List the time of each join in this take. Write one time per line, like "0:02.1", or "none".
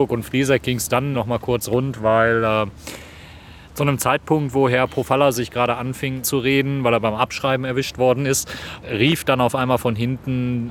0:01.1
0:06.2
0:08.8

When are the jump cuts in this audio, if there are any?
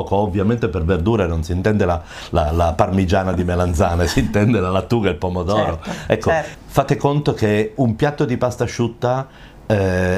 0:07.8

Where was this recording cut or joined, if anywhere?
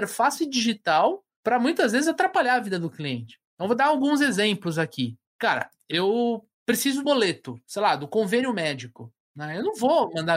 0:07.0

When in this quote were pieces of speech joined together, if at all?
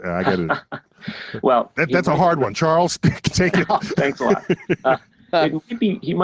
none

